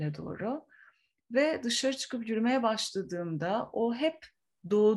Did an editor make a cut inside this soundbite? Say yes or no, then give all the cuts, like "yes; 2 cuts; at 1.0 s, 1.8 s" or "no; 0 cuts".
no; 0 cuts